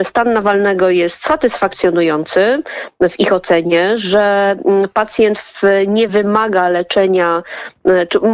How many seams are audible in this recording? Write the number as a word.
zero